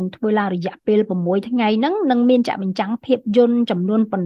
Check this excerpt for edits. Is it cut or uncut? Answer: uncut